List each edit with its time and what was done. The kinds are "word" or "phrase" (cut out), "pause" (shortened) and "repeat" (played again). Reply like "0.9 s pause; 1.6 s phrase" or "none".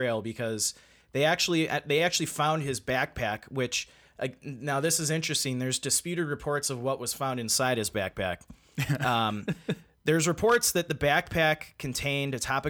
none